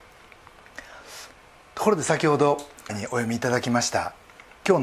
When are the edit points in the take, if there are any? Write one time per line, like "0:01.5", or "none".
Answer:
0:02.9